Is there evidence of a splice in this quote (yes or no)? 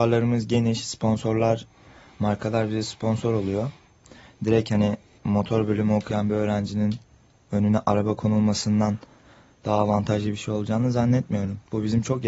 yes